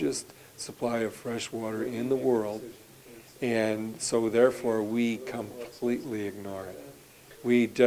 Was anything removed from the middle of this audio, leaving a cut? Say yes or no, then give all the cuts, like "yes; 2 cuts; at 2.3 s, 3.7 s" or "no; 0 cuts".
no; 0 cuts